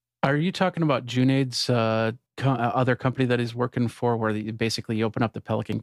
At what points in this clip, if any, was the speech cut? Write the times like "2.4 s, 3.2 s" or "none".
2.3 s